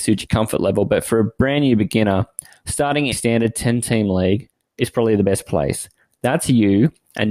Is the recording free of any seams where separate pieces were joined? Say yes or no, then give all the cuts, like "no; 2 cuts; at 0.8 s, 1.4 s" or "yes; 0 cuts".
no; 1 cut; at 3.1 s